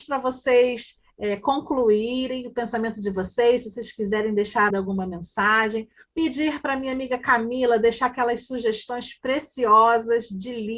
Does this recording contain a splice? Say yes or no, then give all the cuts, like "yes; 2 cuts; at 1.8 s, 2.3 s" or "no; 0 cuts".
yes; 1 cut; at 4.7 s